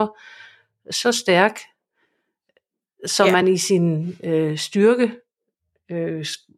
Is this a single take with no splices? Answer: yes; 0 cuts

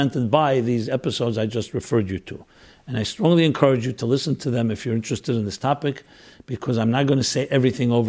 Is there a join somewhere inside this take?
no; 0 cuts

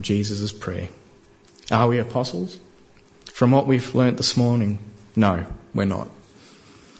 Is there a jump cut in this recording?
no; 0 cuts

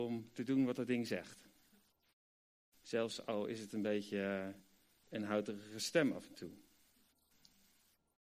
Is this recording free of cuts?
yes; 0 cuts

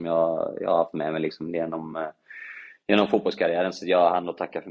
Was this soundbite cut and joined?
no; 0 cuts

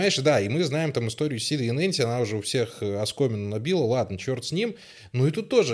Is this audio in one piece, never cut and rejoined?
yes; 0 cuts

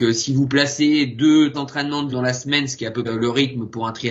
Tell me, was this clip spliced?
yes; 3 cuts; at 1.5 s, 2.1 s, 3.1 s

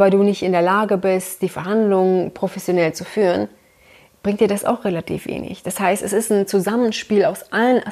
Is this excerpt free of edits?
yes; 0 cuts

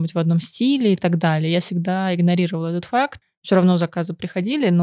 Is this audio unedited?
yes; 0 cuts

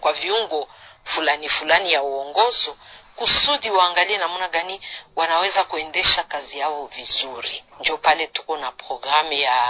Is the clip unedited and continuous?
no; 1 cut; at 7.7 s

